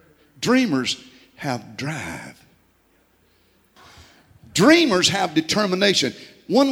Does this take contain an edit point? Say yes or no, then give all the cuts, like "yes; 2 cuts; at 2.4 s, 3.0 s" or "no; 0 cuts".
no; 0 cuts